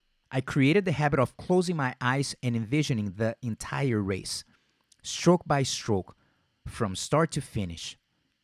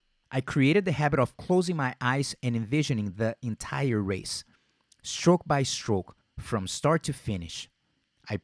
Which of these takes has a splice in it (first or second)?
second